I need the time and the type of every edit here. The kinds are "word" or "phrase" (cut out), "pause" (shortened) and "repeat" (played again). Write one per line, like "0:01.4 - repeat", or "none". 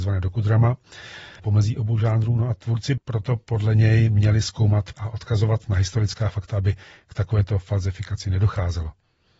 0:01.4 - phrase
0:03.0 - word
0:04.9 - word